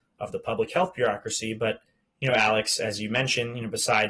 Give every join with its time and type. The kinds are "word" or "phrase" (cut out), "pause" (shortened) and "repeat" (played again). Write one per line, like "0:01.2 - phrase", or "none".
none